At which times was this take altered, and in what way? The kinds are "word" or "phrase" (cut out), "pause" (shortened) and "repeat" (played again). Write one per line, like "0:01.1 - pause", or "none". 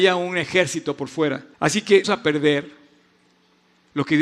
0:01.5 - pause
0:02.0 - phrase